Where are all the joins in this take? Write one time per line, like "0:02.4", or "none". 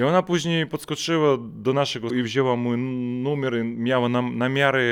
0:02.1